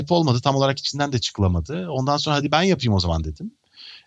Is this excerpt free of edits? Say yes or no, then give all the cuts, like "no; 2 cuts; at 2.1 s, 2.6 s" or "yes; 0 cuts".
yes; 0 cuts